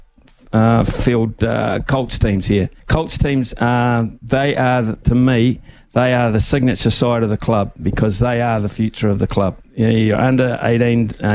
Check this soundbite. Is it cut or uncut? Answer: cut